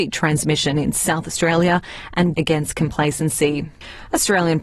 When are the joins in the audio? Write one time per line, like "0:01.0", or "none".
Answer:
0:02.3